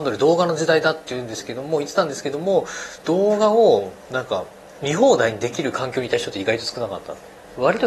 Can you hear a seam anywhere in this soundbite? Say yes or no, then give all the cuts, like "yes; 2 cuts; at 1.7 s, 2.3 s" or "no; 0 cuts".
no; 0 cuts